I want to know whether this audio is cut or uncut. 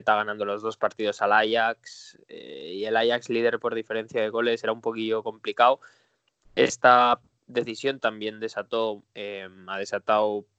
uncut